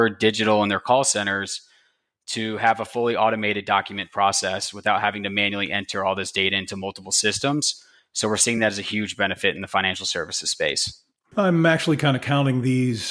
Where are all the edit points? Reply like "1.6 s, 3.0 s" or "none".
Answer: none